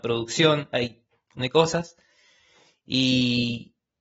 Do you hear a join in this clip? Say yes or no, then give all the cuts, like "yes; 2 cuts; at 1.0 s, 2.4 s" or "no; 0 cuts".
yes; 1 cut; at 1.4 s